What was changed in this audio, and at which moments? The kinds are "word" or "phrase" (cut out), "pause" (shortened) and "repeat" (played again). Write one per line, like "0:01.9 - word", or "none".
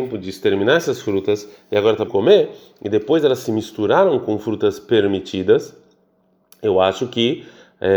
0:02.1 - word